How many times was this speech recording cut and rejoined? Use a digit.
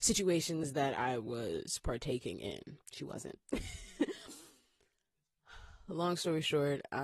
1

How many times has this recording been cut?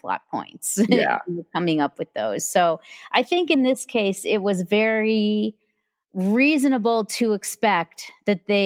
0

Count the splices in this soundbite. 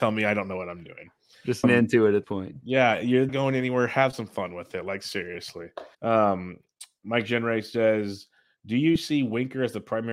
4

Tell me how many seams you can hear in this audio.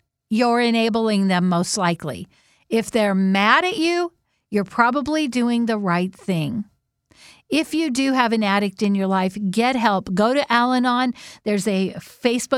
0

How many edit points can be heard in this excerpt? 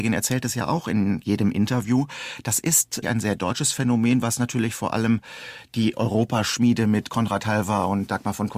1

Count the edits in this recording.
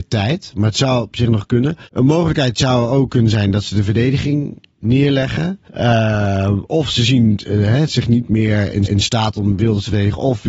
3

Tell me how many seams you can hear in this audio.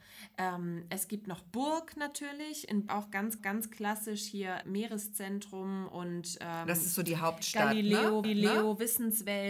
4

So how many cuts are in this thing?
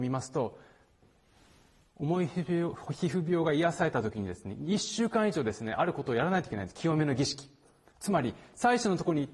0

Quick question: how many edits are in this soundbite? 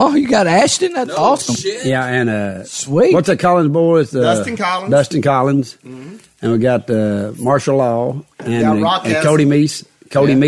1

